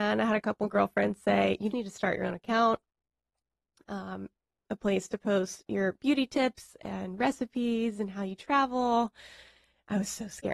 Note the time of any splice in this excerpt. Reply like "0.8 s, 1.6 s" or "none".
1.7 s